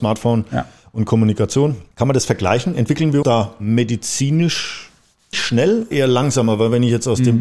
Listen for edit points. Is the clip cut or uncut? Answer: cut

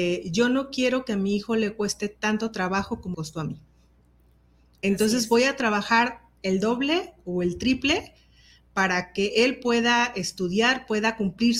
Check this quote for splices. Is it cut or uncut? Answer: cut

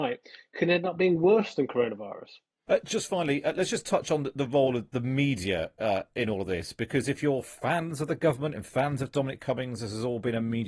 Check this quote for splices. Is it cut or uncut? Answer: uncut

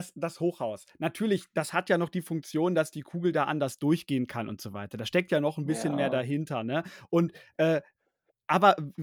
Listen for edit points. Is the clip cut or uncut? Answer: uncut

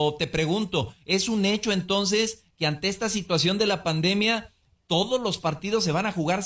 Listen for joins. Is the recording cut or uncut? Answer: uncut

